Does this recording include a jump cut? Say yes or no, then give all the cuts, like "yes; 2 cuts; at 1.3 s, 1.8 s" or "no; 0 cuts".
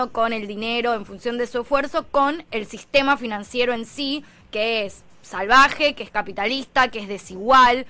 no; 0 cuts